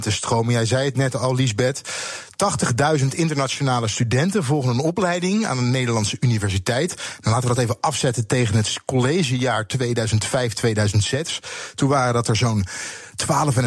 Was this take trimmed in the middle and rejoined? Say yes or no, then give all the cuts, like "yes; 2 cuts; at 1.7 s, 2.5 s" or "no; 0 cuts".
no; 0 cuts